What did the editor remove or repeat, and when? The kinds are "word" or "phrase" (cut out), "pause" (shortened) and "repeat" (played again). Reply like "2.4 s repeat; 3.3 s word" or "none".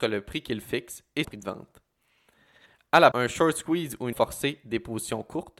1.2 s word; 3.1 s word; 4.1 s word